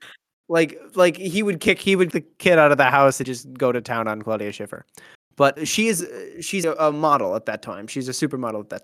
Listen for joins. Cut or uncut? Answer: cut